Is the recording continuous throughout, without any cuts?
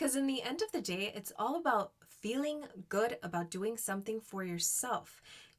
yes; 0 cuts

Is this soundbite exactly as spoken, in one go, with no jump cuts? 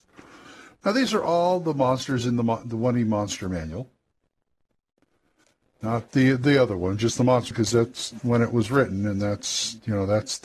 no; 1 cut; at 7.5 s

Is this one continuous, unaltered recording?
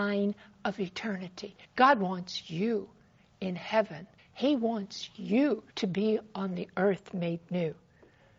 no; 3 cuts; at 1.6 s, 4.2 s, 5.7 s

